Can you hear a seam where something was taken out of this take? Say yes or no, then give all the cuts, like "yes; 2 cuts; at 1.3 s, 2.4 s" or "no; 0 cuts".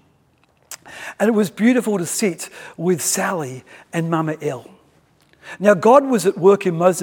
no; 0 cuts